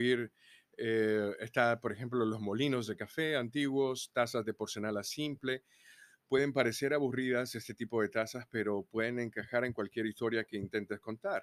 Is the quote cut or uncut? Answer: uncut